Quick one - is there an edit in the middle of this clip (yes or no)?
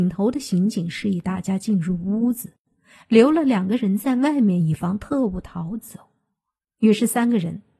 no